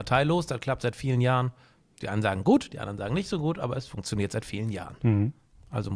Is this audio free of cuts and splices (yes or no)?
yes